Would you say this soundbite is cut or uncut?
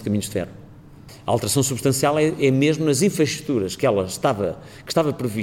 uncut